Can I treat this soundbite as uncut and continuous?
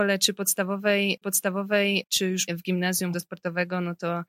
no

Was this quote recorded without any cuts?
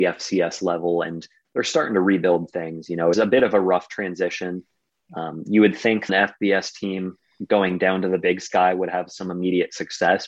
no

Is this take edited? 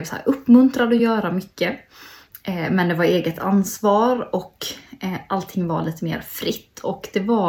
no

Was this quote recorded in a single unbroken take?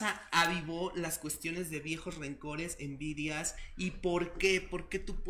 yes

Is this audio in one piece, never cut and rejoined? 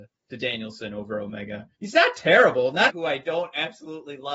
no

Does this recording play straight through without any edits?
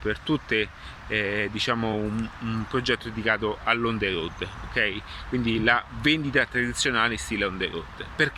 yes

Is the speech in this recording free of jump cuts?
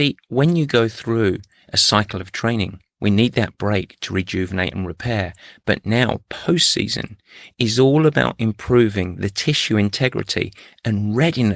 yes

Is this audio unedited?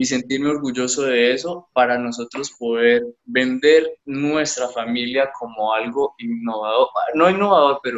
no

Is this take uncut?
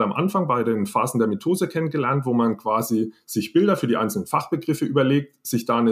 yes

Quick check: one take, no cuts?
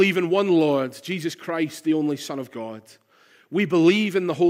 yes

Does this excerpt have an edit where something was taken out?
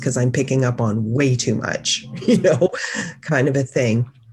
no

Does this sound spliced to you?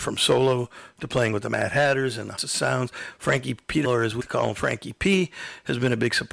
yes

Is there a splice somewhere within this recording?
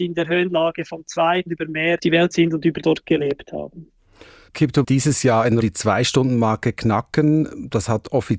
yes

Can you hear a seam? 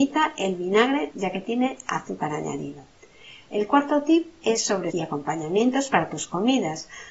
yes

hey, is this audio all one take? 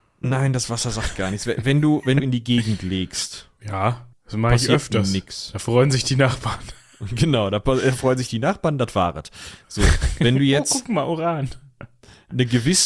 no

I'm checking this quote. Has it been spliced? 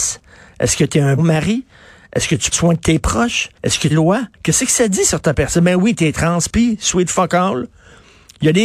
yes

